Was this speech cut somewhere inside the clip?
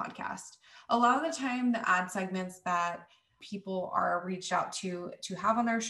no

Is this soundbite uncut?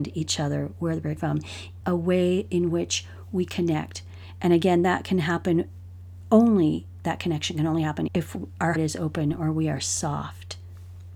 no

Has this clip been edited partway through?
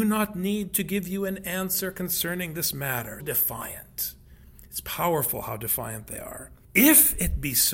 yes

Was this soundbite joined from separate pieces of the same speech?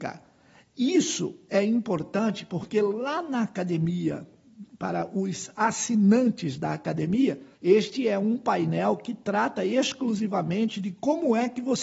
yes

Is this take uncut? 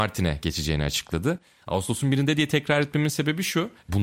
yes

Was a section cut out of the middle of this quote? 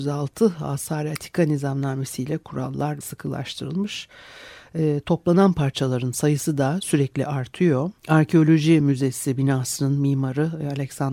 yes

